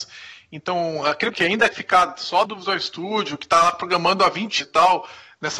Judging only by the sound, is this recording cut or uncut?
cut